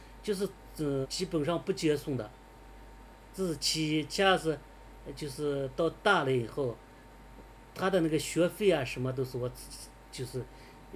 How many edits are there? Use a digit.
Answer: 1